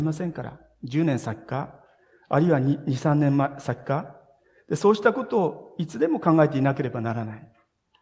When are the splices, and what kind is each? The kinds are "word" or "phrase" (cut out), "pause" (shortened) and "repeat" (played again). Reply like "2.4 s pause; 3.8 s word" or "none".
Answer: none

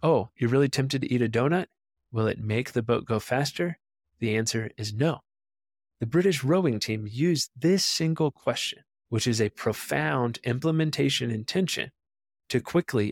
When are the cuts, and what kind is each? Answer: none

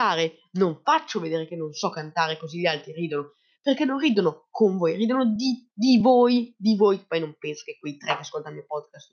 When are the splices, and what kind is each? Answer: none

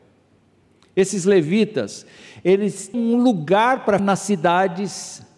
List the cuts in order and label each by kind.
2.9 s word; 4.0 s word

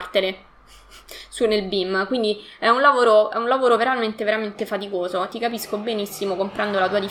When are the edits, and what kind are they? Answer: none

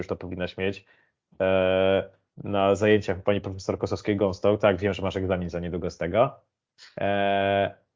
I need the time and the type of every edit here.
none

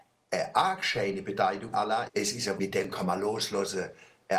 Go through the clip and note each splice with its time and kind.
1.7 s word; 2.1 s word; 2.6 s word

